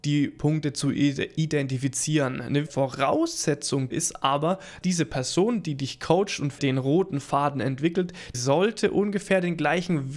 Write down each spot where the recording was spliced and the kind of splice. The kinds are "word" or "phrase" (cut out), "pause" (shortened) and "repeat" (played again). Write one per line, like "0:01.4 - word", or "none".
0:02.7 - word
0:03.9 - word
0:04.8 - word
0:06.6 - word
0:08.3 - word